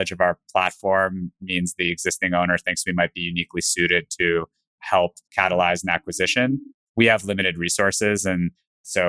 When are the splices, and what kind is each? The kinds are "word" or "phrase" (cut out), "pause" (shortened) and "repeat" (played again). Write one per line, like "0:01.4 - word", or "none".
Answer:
0:05.2 - pause